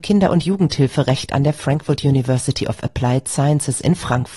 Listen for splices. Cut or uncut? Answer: uncut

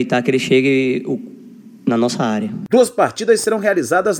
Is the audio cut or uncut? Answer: uncut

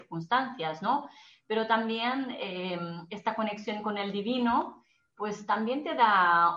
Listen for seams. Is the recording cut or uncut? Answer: uncut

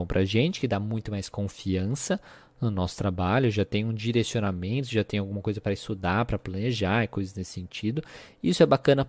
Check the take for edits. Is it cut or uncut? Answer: uncut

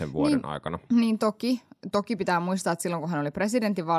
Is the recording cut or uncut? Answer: uncut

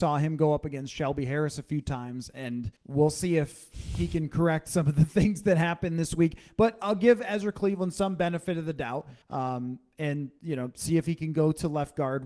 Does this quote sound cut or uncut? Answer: cut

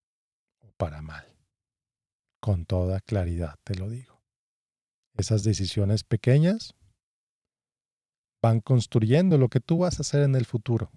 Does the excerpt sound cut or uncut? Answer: uncut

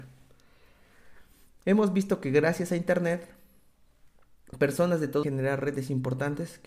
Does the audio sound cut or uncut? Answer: cut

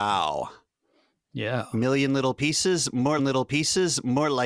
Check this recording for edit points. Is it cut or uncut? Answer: cut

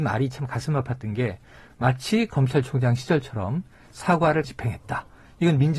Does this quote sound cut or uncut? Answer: cut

